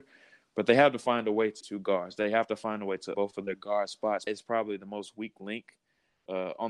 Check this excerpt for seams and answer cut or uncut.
cut